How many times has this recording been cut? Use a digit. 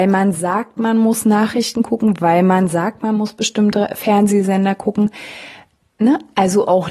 0